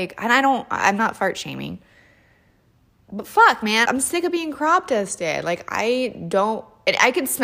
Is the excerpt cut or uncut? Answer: cut